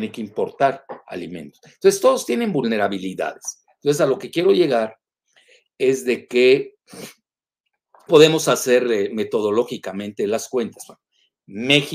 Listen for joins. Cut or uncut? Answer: cut